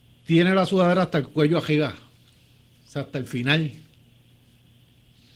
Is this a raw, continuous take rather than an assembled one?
yes; 0 cuts

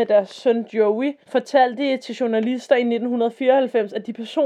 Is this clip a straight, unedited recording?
no; 1 cut; at 1.2 s

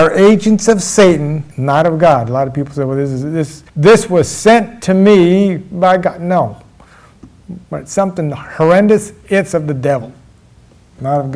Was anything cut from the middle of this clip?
yes; 3 cuts; at 1.5 s, 3.7 s, 7.6 s

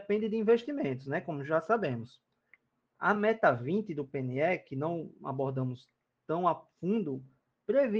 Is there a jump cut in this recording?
no; 0 cuts

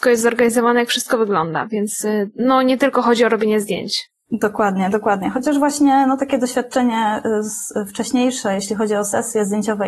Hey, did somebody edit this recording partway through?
no; 0 cuts

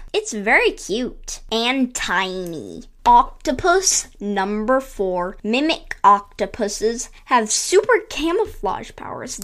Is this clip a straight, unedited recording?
yes; 0 cuts

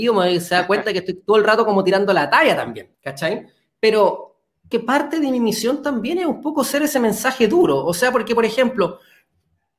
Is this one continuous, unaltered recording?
no; 2 cuts; at 2.9 s, 4.7 s

